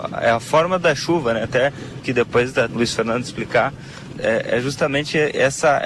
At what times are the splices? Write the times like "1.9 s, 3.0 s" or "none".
2.0 s, 2.7 s, 4.1 s